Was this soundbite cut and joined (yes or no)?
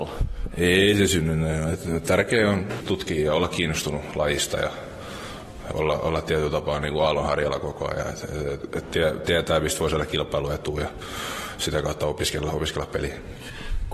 yes